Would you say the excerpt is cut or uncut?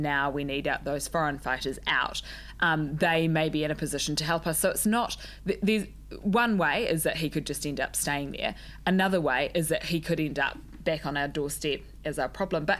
uncut